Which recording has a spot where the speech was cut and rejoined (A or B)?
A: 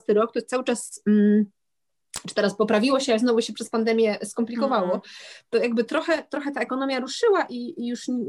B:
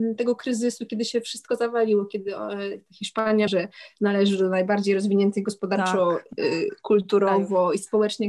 B